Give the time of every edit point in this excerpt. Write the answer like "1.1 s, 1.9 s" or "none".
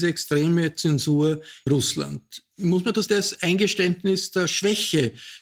1.7 s, 3.1 s